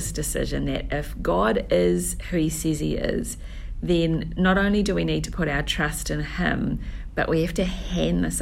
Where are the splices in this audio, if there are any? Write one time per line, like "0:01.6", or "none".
none